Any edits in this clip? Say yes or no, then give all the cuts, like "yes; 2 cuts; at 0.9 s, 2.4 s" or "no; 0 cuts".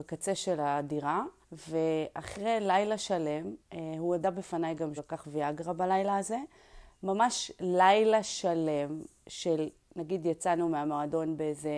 yes; 3 cuts; at 1.4 s, 3.6 s, 5.0 s